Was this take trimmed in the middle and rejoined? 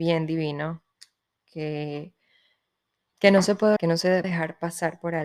yes; 2 cuts; at 3.8 s, 4.2 s

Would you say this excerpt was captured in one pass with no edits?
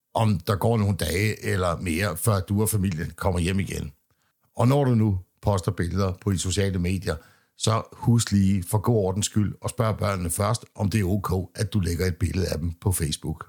yes; 0 cuts

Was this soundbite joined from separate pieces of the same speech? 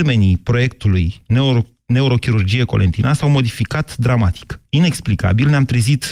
no; 0 cuts

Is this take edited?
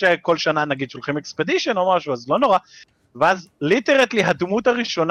no; 0 cuts

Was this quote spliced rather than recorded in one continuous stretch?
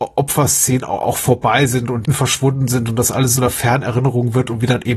yes; 2 cuts; at 2.0 s, 3.4 s

